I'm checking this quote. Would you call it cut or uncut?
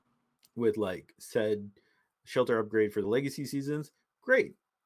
uncut